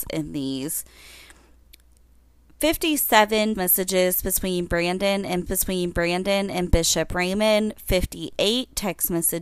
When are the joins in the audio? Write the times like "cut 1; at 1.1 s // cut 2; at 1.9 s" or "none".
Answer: cut 1; at 3.6 s // cut 2; at 5.5 s